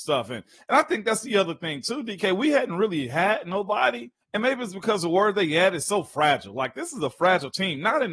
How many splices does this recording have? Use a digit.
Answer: 1